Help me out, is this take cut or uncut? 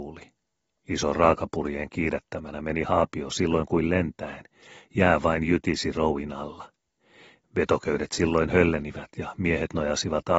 uncut